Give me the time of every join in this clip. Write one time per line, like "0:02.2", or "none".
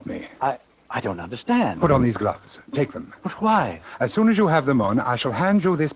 none